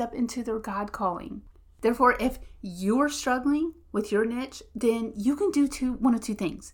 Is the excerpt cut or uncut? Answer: uncut